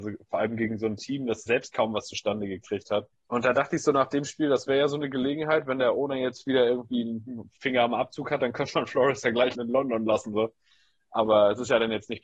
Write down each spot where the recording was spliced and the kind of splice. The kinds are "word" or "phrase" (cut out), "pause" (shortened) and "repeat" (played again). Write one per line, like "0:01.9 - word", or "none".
0:01.5 - word
0:03.1 - pause
0:07.6 - word
0:09.5 - word
0:10.3 - word